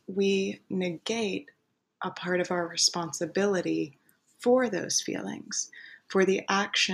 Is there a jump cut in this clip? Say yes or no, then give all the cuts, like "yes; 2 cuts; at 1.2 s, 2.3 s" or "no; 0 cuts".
no; 0 cuts